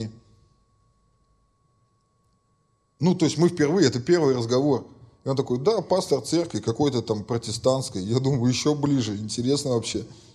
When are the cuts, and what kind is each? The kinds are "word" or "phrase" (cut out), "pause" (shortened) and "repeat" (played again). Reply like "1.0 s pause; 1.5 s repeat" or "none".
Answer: none